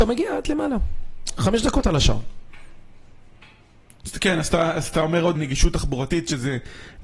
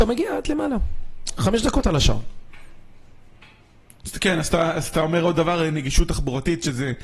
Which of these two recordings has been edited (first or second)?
first